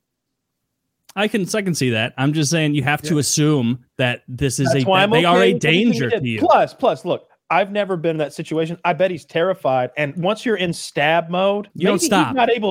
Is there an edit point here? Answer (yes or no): yes